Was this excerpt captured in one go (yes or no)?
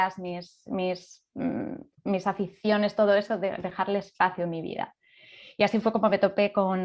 yes